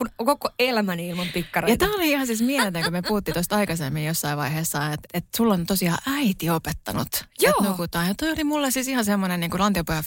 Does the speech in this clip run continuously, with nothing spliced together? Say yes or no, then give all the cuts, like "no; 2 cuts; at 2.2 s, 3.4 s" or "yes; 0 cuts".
no; 1 cut; at 5.1 s